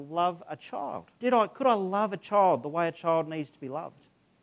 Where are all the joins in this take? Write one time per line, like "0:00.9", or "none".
0:01.1